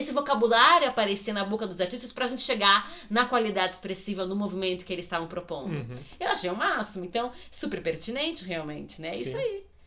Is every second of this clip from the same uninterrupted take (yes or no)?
yes